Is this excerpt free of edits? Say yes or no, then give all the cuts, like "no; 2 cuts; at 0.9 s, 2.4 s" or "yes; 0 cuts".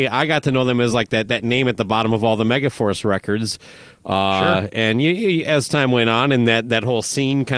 yes; 0 cuts